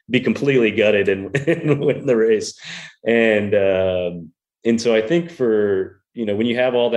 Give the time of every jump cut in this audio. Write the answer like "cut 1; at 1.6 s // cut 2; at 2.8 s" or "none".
none